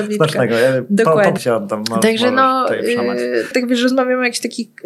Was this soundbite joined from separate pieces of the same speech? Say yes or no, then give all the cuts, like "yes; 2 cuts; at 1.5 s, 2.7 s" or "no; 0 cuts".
yes; 2 cuts; at 1.4 s, 3.5 s